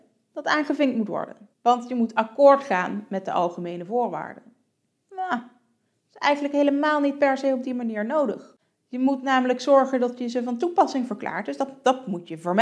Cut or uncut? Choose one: cut